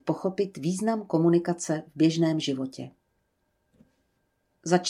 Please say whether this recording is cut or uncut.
uncut